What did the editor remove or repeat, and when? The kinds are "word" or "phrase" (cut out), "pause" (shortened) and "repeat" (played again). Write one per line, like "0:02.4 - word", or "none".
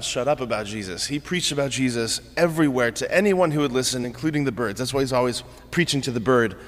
none